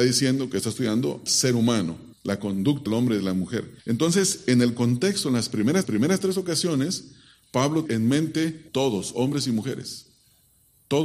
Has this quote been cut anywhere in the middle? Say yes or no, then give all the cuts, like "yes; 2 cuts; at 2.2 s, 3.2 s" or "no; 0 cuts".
yes; 7 cuts; at 1.3 s, 2.1 s, 2.9 s, 3.8 s, 5.8 s, 7.9 s, 8.7 s